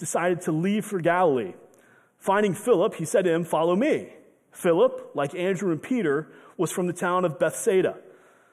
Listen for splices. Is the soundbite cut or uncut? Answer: uncut